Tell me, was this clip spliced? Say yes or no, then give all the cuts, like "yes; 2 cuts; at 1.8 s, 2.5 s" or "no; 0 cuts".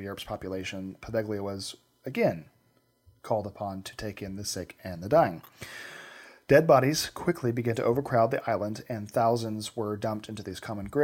no; 0 cuts